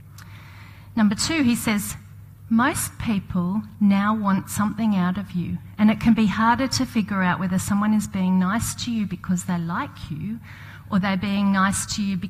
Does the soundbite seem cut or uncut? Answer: uncut